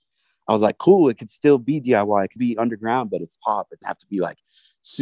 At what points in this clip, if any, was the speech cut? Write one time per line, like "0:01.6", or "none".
0:01.2
0:02.4
0:03.3
0:03.8